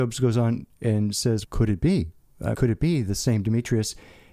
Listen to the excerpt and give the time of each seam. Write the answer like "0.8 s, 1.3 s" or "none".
1.4 s, 2.5 s